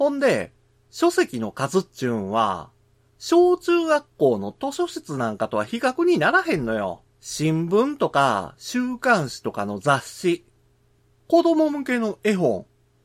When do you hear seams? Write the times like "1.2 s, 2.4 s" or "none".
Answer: 7.1 s